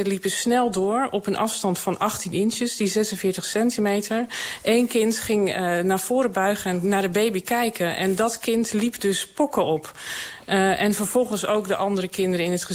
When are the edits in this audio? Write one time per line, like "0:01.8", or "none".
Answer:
none